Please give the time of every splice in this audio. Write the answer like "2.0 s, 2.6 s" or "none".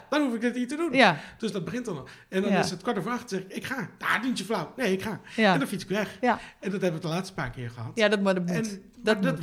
7.0 s